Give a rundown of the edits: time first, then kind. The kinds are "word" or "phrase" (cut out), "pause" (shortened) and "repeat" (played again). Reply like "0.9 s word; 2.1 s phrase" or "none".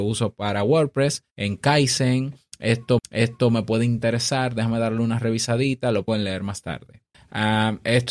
1.3 s pause; 3.0 s repeat; 6.1 s word; 7.1 s pause